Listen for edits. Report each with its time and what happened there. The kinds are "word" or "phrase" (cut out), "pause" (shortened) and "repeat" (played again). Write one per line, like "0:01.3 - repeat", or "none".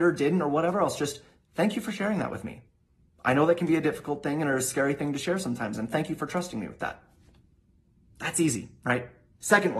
none